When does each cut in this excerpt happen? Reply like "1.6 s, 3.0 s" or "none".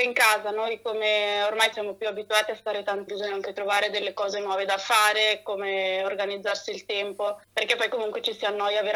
1.7 s, 3.1 s, 7.4 s